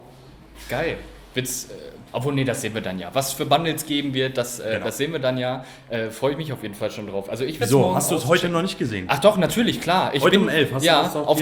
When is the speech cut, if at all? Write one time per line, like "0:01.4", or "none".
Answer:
0:02.1